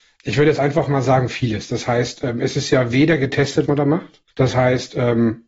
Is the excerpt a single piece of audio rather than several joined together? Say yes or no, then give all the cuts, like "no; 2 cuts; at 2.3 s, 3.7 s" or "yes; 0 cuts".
no; 2 cuts; at 3.7 s, 4.3 s